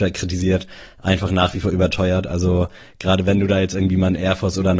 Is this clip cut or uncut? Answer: uncut